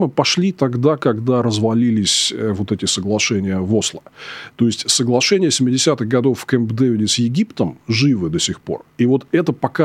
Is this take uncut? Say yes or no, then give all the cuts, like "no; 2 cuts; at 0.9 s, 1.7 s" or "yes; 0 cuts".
no; 1 cut; at 8.9 s